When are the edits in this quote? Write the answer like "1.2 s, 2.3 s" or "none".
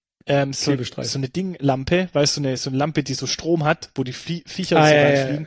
1.1 s